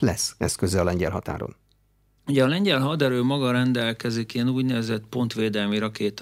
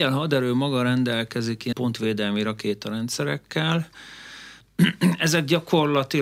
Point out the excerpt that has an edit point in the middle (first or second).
second